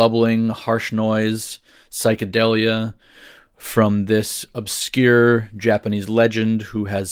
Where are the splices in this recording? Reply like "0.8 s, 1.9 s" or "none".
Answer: none